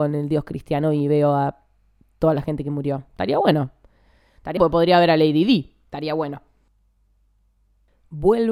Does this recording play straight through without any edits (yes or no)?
no